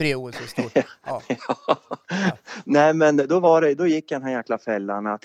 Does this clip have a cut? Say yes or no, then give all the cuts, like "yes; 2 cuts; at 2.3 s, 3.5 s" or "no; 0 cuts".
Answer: no; 0 cuts